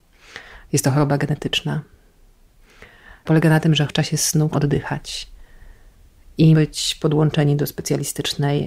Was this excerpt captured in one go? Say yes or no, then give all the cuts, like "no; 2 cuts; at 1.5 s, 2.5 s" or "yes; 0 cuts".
no; 4 cuts; at 3.3 s, 3.9 s, 4.5 s, 6.5 s